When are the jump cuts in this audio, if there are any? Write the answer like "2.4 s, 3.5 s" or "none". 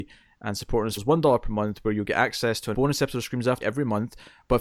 1.0 s, 2.7 s, 3.6 s